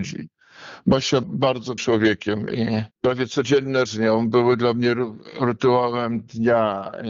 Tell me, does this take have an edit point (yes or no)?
yes